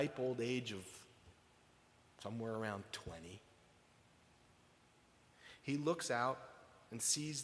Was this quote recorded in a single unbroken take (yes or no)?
yes